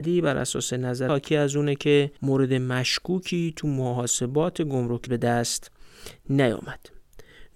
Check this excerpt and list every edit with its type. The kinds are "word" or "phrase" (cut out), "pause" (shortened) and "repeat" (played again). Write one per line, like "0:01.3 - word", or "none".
0:01.1 - word
0:02.2 - pause
0:05.1 - word